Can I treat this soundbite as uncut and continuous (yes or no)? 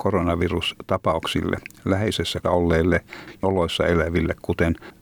no